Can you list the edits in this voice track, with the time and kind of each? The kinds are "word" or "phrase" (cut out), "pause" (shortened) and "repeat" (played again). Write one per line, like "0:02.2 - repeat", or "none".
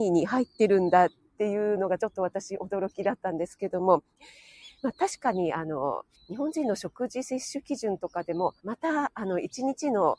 0:06.1 - pause
0:08.6 - pause